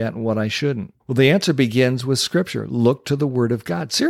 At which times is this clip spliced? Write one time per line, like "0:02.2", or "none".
0:01.0